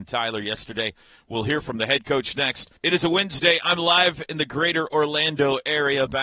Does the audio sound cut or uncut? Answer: cut